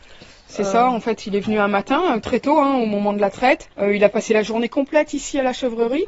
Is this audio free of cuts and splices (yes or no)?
no